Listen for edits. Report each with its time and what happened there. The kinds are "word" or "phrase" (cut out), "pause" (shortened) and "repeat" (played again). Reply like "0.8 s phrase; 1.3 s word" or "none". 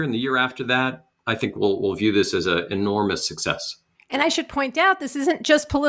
3.9 s pause